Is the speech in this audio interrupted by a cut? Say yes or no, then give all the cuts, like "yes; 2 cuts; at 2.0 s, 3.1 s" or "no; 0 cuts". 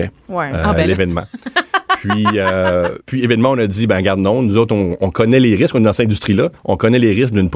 yes; 2 cuts; at 3.0 s, 6.6 s